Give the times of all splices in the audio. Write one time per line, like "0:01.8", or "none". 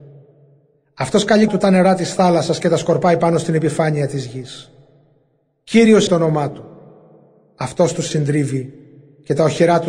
0:01.5
0:06.1
0:08.1